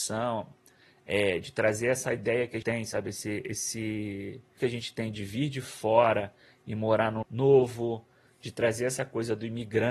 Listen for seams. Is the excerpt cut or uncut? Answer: cut